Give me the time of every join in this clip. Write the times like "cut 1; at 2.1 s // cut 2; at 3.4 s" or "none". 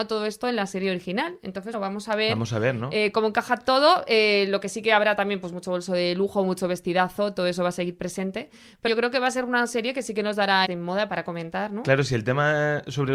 cut 1; at 1.7 s // cut 2; at 8.9 s // cut 3; at 10.6 s